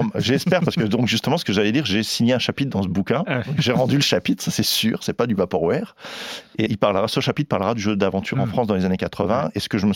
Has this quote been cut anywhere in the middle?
yes; 1 cut; at 6.7 s

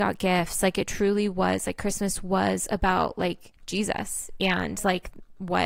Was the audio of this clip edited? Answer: yes; 1 cut; at 3.6 s

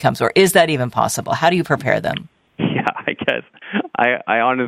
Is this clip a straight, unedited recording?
yes; 0 cuts

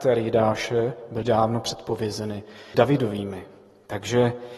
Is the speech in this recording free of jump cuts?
no; 2 cuts; at 1.2 s, 2.7 s

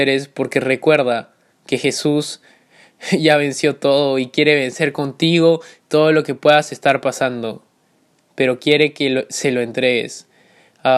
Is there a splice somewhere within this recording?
no; 0 cuts

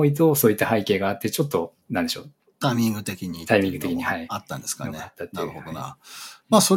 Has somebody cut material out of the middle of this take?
yes; 1 cut; at 1.8 s

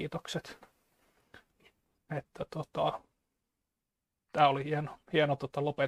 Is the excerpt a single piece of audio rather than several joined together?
yes; 0 cuts

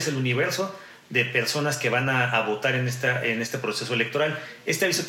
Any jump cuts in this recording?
no; 0 cuts

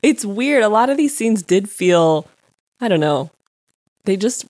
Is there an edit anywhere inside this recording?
no; 0 cuts

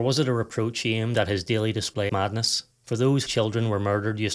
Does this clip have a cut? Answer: yes; 3 cuts; at 2.1 s, 2.7 s, 3.3 s

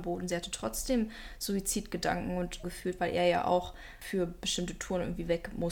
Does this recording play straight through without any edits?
no; 1 cut; at 2.6 s

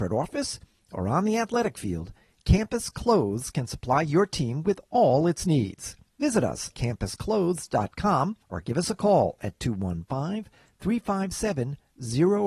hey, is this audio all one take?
no; 3 cuts; at 6.1 s, 6.7 s, 8.4 s

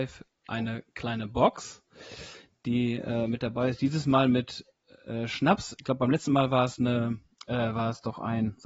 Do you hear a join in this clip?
no; 0 cuts

